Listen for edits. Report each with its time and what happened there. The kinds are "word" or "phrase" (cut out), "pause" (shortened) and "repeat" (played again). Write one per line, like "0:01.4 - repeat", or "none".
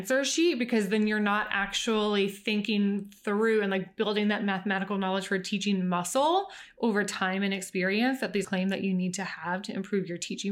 0:08.4 - word